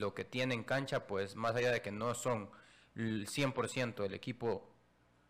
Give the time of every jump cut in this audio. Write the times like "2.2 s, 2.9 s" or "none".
none